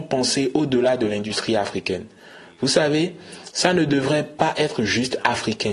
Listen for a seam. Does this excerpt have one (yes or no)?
no